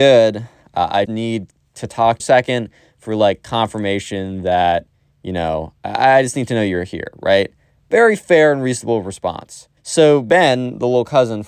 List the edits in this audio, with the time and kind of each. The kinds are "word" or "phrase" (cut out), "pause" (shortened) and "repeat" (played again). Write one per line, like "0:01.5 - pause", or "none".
0:01.0 - word
0:02.2 - phrase
0:09.8 - pause